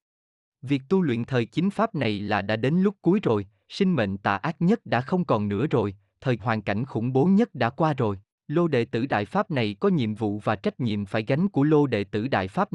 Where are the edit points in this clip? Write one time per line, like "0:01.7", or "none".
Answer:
0:01.5
0:06.4
0:08.3